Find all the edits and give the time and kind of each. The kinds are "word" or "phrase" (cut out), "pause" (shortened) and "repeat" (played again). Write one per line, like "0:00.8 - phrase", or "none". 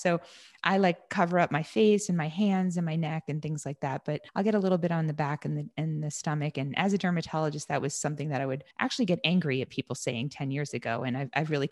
0:04.3 - pause
0:08.7 - pause